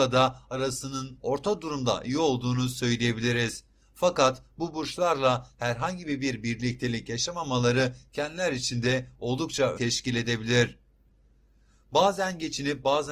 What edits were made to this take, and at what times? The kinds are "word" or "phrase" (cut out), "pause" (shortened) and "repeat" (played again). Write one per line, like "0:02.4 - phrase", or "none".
0:09.8 - word